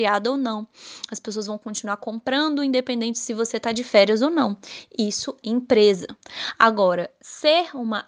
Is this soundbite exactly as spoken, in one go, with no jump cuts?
no; 1 cut; at 5.4 s

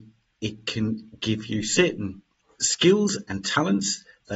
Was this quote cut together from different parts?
no; 0 cuts

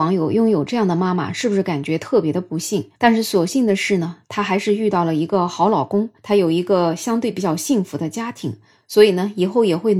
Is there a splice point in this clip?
yes; 2 cuts; at 3.0 s, 6.2 s

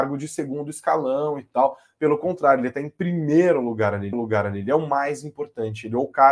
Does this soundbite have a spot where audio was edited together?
yes; 1 cut; at 4.1 s

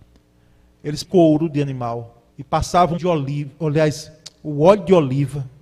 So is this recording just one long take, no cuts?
no; 3 cuts; at 1.0 s, 2.3 s, 3.0 s

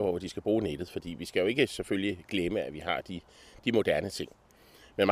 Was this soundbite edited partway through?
no; 0 cuts

